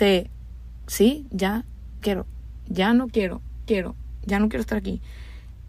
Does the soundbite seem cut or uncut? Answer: cut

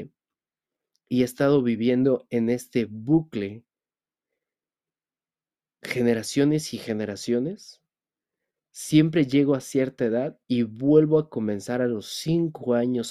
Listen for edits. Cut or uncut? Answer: uncut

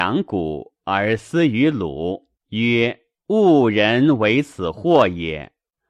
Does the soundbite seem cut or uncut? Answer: cut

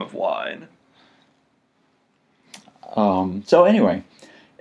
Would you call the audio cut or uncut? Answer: uncut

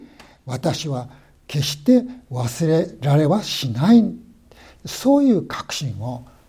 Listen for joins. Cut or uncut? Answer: uncut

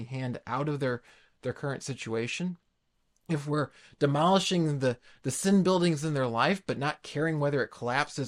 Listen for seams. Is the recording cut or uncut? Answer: uncut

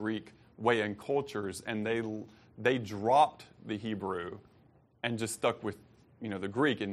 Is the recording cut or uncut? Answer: uncut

